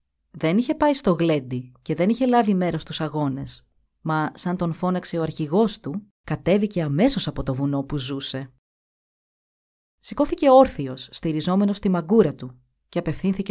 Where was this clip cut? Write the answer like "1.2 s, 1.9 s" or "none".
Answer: 3.9 s, 6.1 s